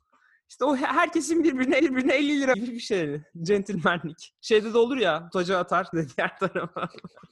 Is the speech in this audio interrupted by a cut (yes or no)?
yes